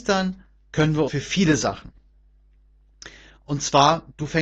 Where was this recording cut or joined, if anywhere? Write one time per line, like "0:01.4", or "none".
0:01.1